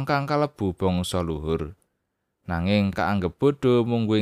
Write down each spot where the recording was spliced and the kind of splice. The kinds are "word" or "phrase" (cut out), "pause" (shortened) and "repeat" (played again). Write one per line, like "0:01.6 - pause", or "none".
0:02.9 - word

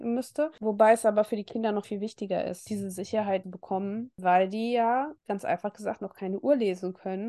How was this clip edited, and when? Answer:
0:01.8 - word
0:03.4 - phrase
0:05.2 - pause

